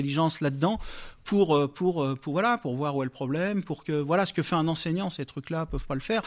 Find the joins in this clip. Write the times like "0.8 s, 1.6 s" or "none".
none